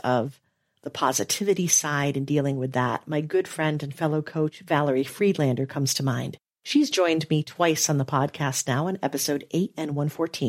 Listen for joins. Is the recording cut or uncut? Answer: uncut